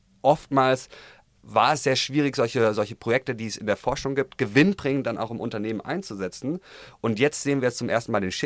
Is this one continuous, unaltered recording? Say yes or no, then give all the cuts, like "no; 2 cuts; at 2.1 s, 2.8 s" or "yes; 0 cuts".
yes; 0 cuts